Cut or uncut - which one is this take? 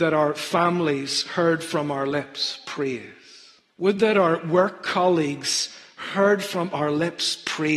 cut